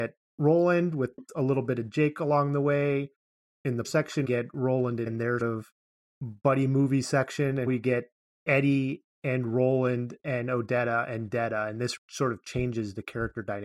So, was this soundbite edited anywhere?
yes; 6 cuts; at 3.8 s, 4.2 s, 5.1 s, 5.4 s, 7.7 s, 12.0 s

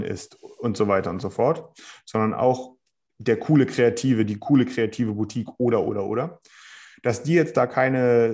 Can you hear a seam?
no; 0 cuts

